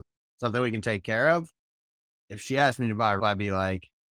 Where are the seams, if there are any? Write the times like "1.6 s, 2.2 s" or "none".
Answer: 3.2 s